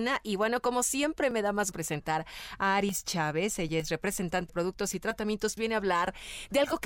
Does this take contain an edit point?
yes; 3 cuts; at 1.7 s, 4.5 s, 5.6 s

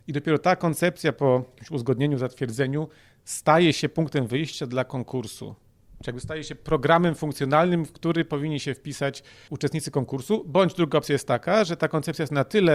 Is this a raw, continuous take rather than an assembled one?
yes; 0 cuts

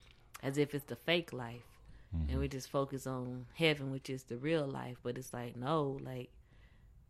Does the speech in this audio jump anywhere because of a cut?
yes; 1 cut; at 2.1 s

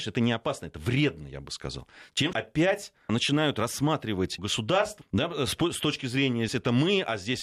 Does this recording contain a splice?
yes; 6 cuts; at 2.3 s, 3.1 s, 4.4 s, 5.0 s, 5.5 s, 6.5 s

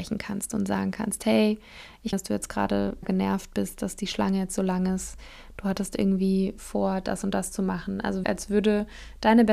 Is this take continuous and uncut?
no; 3 cuts; at 2.1 s, 3.0 s, 8.2 s

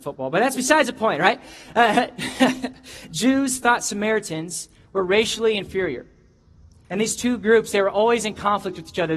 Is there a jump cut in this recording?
yes; 1 cut; at 6.6 s

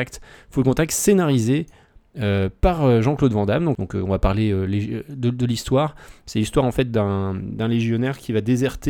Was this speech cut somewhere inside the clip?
no; 0 cuts

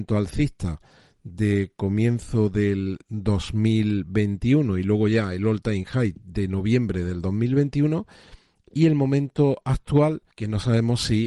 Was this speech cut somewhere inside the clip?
yes; 1 cut; at 10.3 s

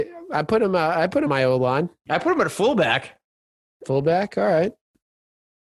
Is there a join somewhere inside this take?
yes; 1 cut; at 1.3 s

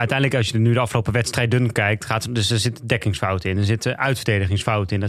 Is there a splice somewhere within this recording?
no; 0 cuts

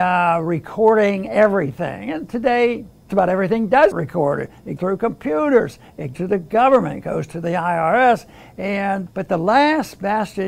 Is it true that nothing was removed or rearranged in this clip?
no; 5 cuts; at 3.1 s, 3.9 s, 4.8 s, 6.1 s, 9.1 s

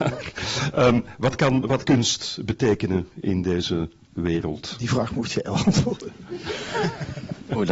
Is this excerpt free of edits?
no; 1 cut; at 1.8 s

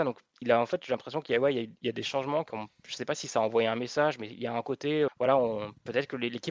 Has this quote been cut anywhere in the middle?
yes; 1 cut; at 5.1 s

